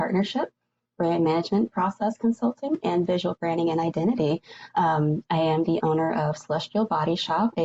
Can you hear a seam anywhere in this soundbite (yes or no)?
no